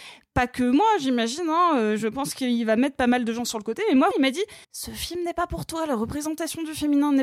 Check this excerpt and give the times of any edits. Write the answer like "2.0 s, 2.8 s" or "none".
4.1 s, 4.6 s

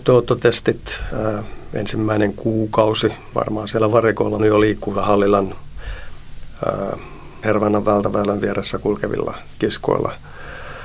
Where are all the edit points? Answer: 3.3 s, 4.4 s, 4.9 s, 7.4 s

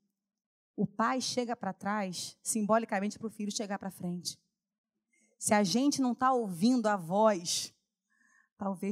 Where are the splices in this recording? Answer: none

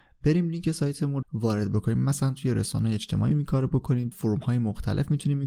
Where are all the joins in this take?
1.2 s, 3.3 s, 4.1 s

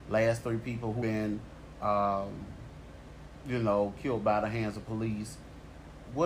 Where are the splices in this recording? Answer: 1.0 s

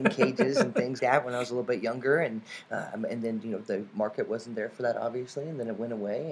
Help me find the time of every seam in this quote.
1.0 s

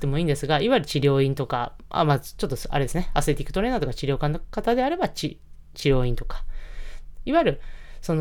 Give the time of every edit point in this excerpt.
none

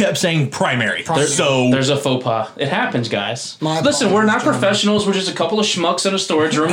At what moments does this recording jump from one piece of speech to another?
none

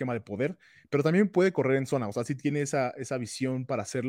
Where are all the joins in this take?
none

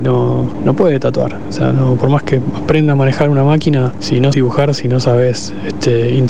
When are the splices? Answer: 4.3 s

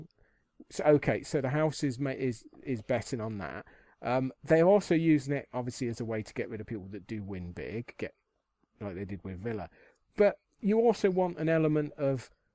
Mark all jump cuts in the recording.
none

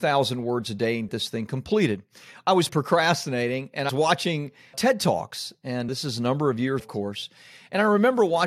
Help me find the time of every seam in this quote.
1.1 s, 2.7 s, 3.9 s, 4.7 s, 5.9 s, 6.8 s

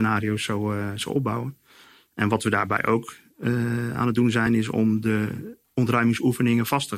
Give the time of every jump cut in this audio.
none

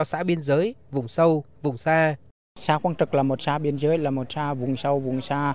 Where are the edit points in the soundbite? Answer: none

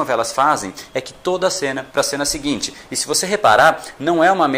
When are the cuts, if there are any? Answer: 1.9 s

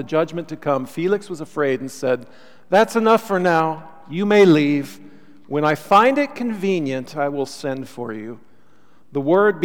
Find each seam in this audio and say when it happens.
none

